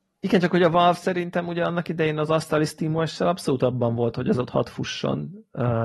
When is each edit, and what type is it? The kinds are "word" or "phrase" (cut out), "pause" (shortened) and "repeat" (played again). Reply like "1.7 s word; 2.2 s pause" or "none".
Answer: none